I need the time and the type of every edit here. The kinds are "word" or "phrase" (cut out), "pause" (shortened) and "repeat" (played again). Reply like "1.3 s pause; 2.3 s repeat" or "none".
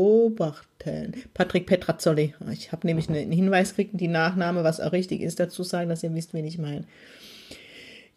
5.6 s word

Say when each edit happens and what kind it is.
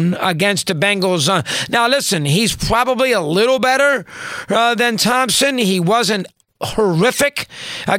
none

